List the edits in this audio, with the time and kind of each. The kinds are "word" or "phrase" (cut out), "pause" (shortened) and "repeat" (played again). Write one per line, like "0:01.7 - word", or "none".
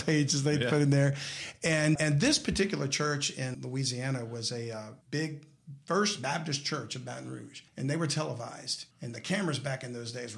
0:02.0 - word
0:03.5 - word
0:05.0 - pause
0:07.7 - pause
0:08.9 - pause